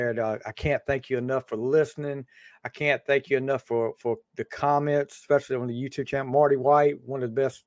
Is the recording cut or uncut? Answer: uncut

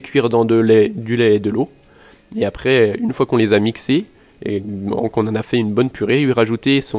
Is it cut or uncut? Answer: uncut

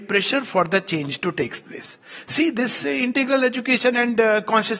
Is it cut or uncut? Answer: uncut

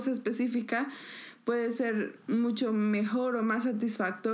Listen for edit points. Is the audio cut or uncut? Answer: uncut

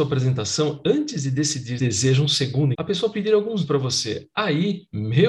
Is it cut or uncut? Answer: cut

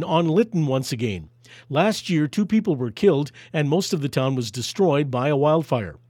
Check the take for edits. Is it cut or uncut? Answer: uncut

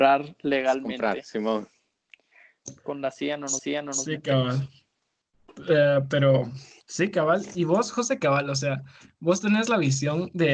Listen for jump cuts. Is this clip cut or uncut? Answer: cut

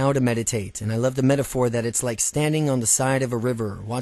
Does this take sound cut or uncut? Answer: uncut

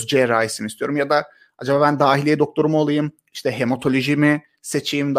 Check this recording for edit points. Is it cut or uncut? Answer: uncut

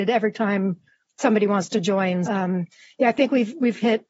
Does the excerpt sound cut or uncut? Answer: cut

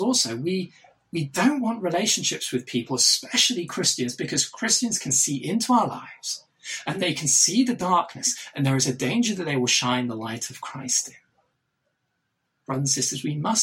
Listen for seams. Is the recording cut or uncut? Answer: uncut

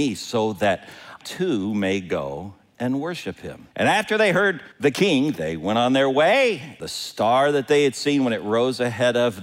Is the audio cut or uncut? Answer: cut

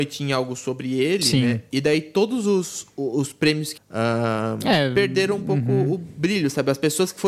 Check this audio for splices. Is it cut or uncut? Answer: cut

